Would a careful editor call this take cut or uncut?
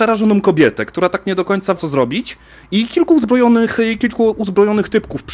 cut